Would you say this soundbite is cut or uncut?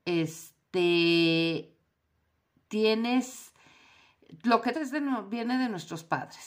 cut